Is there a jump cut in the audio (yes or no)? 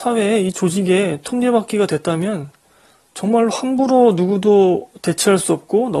no